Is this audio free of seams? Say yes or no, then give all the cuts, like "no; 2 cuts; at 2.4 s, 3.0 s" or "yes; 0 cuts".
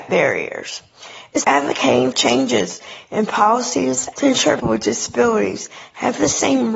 no; 4 cuts; at 1.4 s, 2.1 s, 4.1 s, 4.6 s